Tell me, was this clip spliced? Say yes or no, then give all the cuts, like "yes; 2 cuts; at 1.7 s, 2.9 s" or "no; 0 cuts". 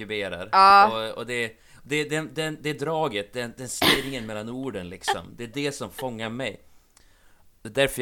no; 0 cuts